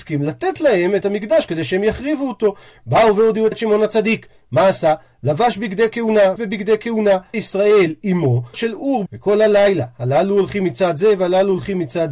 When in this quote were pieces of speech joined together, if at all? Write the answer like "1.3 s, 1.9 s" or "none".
1.0 s, 3.5 s, 6.4 s, 7.3 s, 8.5 s, 9.1 s